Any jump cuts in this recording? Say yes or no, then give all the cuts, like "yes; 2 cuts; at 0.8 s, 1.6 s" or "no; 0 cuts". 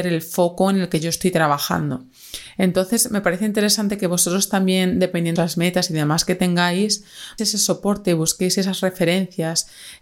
yes; 2 cuts; at 5.4 s, 7.4 s